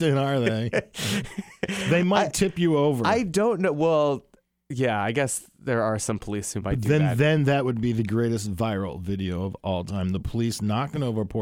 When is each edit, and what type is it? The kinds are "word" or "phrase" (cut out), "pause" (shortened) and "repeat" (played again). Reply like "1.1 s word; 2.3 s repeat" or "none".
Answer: none